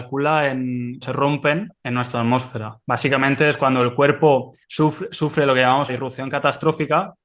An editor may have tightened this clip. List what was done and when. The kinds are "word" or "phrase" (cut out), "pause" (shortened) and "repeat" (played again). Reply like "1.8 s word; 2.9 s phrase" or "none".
1.0 s word; 1.8 s pause; 2.8 s pause; 4.6 s pause; 5.9 s word